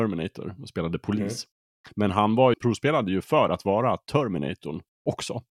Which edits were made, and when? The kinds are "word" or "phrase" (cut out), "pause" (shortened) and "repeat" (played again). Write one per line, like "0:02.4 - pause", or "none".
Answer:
0:02.5 - word